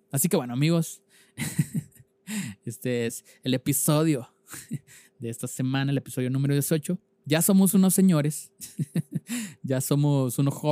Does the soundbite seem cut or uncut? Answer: uncut